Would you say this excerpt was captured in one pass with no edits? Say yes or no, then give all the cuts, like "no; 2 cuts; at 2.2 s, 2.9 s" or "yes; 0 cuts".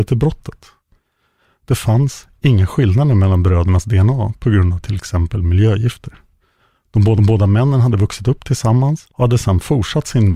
no; 2 cuts; at 7.2 s, 9.1 s